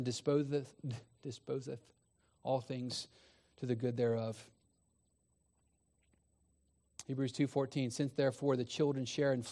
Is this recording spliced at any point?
no; 0 cuts

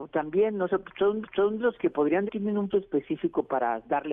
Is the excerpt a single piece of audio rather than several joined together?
no; 3 cuts; at 1.2 s, 2.3 s, 2.7 s

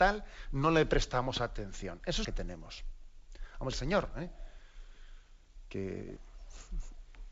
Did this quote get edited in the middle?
yes; 2 cuts; at 2.2 s, 3.7 s

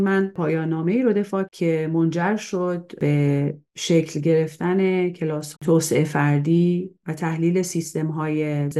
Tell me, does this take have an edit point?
yes; 3 cuts; at 1.4 s, 3.7 s, 5.5 s

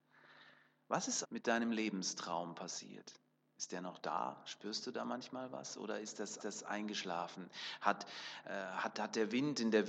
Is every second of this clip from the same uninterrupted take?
no; 3 cuts; at 1.2 s, 3.3 s, 6.4 s

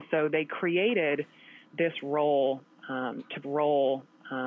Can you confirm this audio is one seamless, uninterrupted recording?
no; 1 cut; at 3.4 s

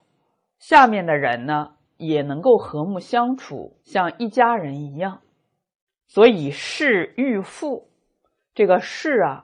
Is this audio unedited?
no; 1 cut; at 3.8 s

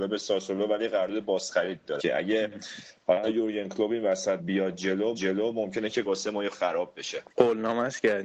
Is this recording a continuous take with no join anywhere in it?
no; 6 cuts; at 2.0 s, 4.4 s, 5.1 s, 6.0 s, 6.5 s, 7.3 s

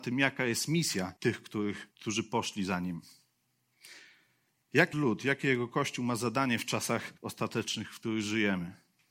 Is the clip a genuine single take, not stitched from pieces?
no; 4 cuts; at 1.2 s, 1.9 s, 4.9 s, 7.2 s

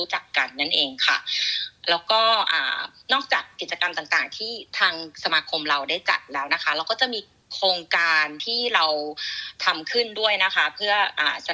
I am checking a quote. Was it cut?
no; 0 cuts

